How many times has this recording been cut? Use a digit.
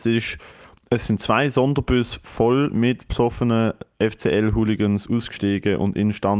0